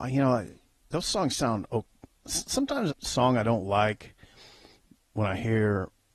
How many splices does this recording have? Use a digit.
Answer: 1